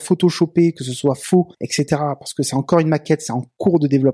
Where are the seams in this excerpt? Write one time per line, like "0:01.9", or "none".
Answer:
0:01.5